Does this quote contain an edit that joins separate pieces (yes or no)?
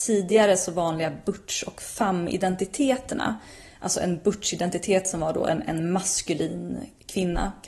no